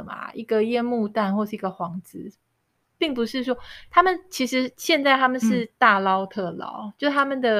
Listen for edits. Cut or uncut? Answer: uncut